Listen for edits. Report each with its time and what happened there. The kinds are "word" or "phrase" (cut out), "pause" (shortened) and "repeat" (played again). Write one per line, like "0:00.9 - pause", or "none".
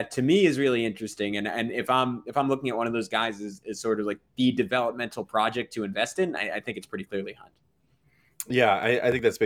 none